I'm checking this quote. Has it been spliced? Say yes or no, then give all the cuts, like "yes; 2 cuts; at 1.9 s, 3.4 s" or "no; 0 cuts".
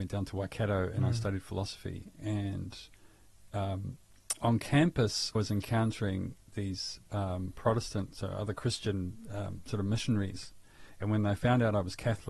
yes; 2 cuts; at 5.3 s, 6.4 s